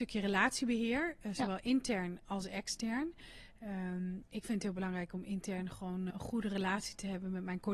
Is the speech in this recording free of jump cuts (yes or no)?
no